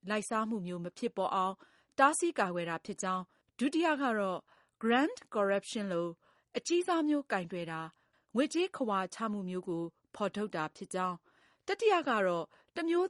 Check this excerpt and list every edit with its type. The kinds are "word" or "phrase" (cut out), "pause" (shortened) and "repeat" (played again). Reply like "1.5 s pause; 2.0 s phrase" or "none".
none